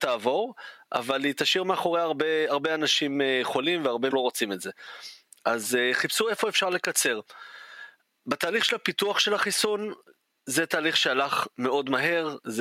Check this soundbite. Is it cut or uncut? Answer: cut